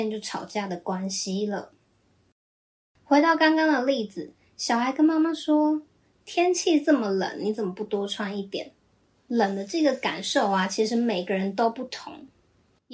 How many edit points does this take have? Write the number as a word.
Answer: zero